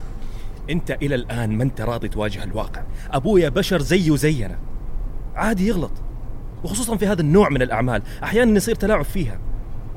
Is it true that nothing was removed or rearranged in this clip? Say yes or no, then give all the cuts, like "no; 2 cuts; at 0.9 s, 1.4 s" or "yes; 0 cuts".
yes; 0 cuts